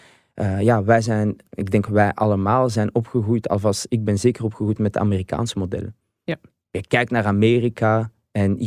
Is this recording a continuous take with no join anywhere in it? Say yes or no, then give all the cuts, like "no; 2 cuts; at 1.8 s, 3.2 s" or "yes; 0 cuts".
yes; 0 cuts